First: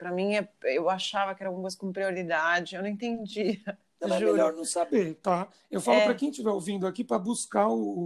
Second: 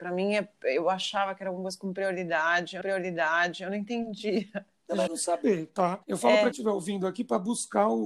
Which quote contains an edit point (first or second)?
second